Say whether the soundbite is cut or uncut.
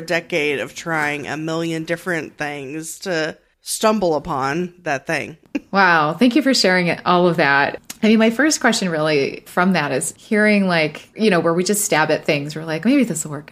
uncut